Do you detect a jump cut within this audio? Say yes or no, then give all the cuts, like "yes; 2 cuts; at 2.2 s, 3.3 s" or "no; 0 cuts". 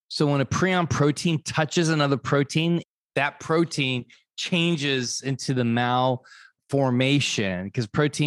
no; 0 cuts